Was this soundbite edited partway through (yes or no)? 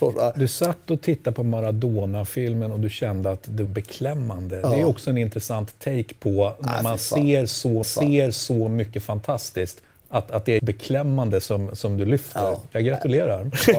yes